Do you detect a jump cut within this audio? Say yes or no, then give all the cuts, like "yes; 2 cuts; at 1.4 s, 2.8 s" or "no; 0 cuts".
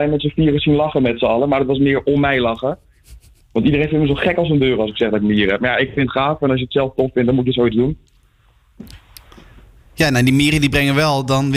no; 0 cuts